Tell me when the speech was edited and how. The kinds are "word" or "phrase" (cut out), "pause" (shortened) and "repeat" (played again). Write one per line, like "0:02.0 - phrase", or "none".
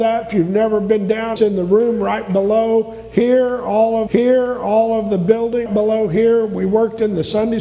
0:01.4 - word
0:04.1 - repeat
0:05.7 - word